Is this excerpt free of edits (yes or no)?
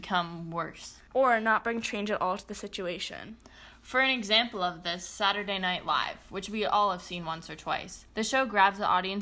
no